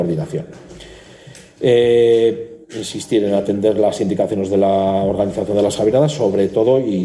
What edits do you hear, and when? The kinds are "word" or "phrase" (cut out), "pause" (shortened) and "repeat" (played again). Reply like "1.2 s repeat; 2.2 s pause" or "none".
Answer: 2.6 s pause